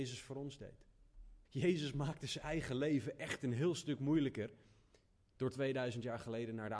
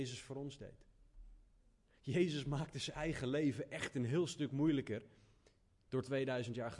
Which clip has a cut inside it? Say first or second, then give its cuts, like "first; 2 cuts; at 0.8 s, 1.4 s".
first; 1 cut; at 1.4 s